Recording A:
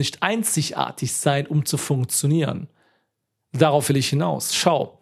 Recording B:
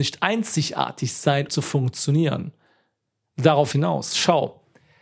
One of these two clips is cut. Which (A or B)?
B